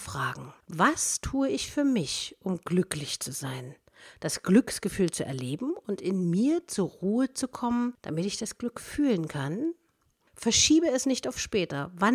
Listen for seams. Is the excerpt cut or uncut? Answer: uncut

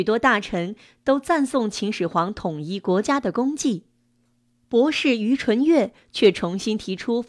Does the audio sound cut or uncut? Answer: uncut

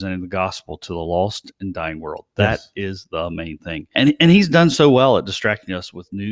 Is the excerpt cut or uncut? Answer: uncut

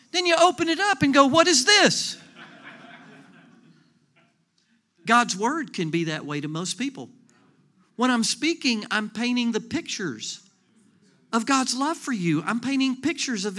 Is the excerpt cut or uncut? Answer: uncut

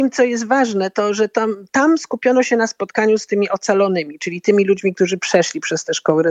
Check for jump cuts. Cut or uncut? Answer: uncut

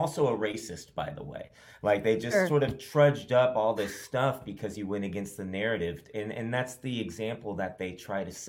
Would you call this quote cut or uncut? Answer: uncut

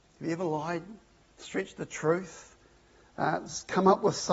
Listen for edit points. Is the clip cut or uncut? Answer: uncut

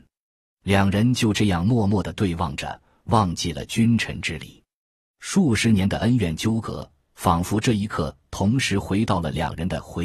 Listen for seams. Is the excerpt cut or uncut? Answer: uncut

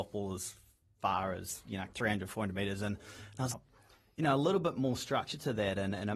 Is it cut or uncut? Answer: cut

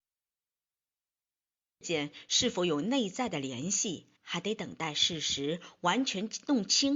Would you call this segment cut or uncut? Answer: cut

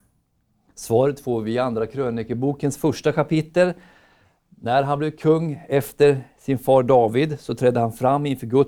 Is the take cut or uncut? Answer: uncut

